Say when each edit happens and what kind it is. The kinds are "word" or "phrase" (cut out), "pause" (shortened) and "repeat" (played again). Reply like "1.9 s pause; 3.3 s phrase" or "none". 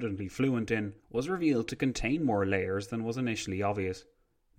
1.0 s pause